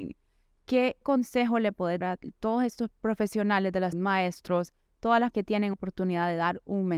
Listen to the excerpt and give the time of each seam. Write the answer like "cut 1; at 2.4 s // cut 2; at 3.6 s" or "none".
cut 1; at 1.0 s // cut 2; at 2.0 s // cut 3; at 2.9 s // cut 4; at 3.9 s // cut 5; at 5.3 s // cut 6; at 5.7 s